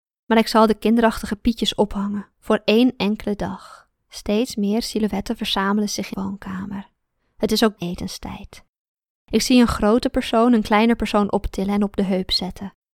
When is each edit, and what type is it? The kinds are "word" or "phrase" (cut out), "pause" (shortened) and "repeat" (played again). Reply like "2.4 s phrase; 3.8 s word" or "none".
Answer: 2.3 s pause; 4.0 s pause; 6.1 s word; 7.8 s word